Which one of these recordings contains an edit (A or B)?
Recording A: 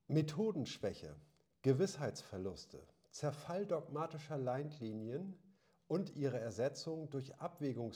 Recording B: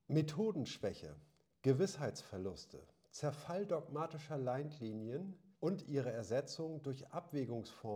B